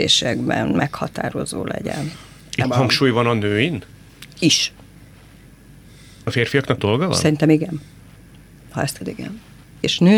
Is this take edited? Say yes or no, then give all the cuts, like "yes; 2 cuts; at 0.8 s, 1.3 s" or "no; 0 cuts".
yes; 4 cuts; at 2.6 s, 6.3 s, 6.8 s, 9.0 s